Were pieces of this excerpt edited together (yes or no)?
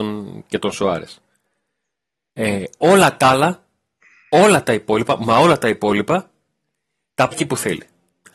yes